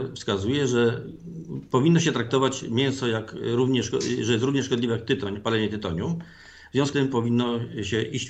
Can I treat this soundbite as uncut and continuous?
no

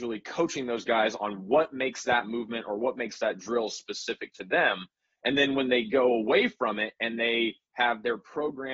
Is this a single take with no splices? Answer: yes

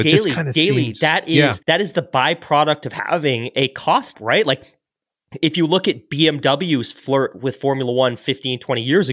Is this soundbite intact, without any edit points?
no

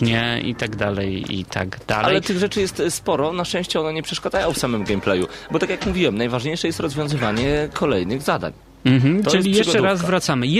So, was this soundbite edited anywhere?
no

